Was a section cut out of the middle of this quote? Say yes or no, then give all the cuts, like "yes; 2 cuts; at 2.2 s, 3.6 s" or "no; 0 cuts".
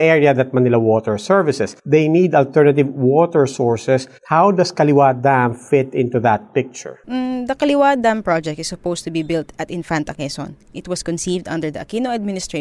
yes; 3 cuts; at 1.8 s, 4.2 s, 7.0 s